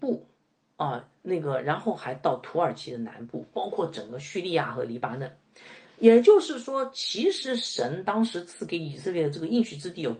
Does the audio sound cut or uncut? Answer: cut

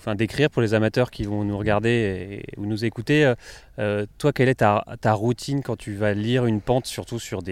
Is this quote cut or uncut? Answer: uncut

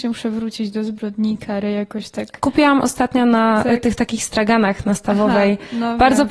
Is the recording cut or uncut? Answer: uncut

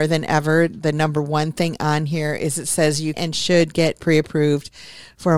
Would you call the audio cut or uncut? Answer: cut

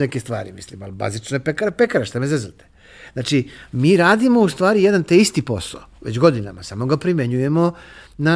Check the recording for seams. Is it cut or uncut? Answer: uncut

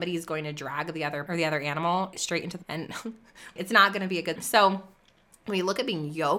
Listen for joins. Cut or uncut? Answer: cut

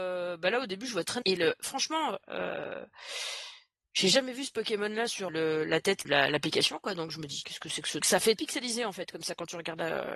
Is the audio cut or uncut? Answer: cut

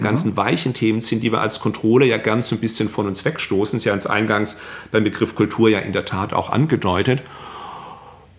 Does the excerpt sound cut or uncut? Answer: uncut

